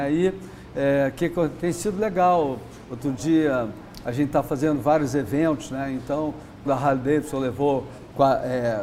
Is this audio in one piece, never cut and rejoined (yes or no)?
no